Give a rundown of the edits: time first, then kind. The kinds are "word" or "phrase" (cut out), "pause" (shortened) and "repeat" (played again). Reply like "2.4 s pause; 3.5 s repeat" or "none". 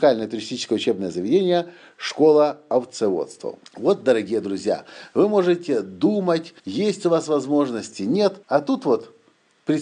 3.7 s pause; 6.6 s pause; 8.4 s pause